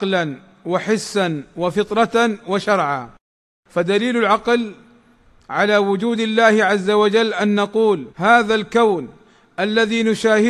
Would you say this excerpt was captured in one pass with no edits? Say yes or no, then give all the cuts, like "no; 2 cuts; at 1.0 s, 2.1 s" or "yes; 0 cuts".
no; 1 cut; at 8.1 s